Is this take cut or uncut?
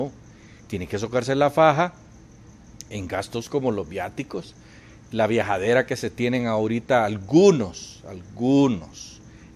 uncut